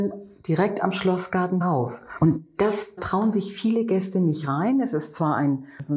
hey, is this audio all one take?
no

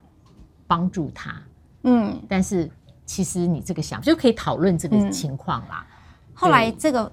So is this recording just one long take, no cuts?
yes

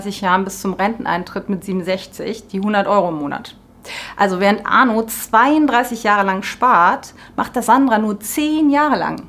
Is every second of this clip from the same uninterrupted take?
yes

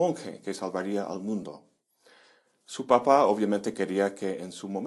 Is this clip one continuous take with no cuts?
yes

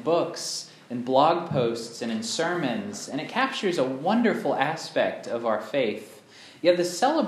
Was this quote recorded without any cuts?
yes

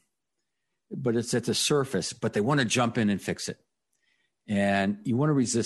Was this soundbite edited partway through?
no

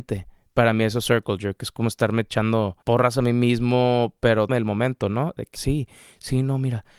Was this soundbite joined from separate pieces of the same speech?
yes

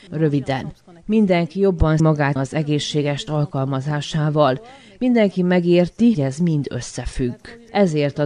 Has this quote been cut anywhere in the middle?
yes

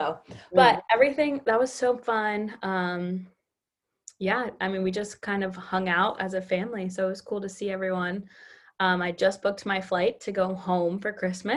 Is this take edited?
no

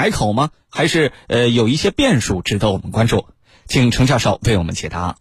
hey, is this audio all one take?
yes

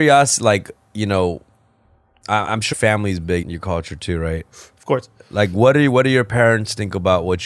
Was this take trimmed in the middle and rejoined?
yes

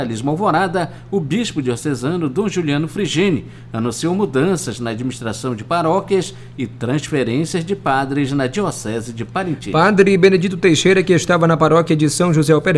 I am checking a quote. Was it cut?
no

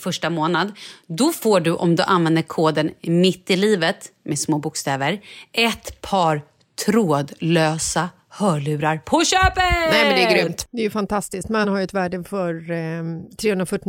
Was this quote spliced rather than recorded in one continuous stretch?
yes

